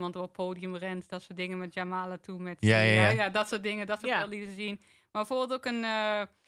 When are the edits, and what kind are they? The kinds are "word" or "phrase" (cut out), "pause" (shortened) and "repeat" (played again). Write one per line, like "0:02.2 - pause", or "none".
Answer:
none